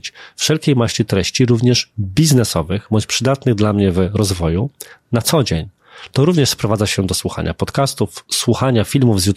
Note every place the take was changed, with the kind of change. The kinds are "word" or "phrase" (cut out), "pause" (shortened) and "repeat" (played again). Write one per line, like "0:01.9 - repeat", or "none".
none